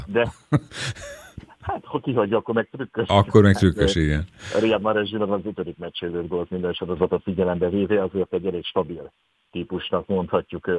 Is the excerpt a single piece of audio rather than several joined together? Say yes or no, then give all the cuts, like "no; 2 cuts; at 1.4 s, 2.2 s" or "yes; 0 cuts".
yes; 0 cuts